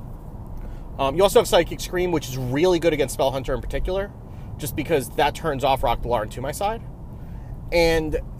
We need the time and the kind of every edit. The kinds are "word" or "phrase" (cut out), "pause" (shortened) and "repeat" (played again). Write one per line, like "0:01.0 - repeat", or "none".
none